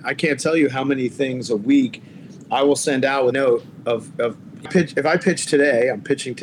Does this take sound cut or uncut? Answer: cut